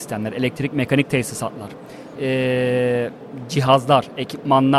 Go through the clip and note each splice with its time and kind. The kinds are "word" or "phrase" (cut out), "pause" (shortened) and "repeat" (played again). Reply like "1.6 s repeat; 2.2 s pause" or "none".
2.2 s phrase